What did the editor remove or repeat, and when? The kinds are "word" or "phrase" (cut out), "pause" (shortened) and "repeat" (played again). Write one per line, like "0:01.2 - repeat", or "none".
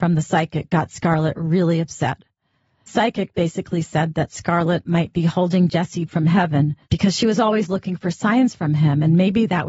0:02.9 - phrase
0:06.1 - word
0:06.8 - pause